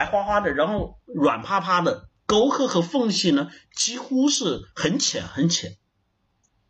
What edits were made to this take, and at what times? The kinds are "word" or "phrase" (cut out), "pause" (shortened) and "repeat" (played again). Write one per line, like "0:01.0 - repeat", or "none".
0:04.7 - pause